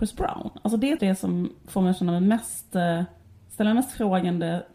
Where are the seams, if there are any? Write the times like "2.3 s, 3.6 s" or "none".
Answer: 1.0 s, 3.2 s